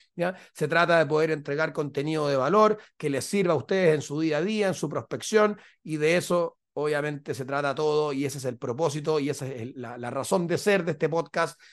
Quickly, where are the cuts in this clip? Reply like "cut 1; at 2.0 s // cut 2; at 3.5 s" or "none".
none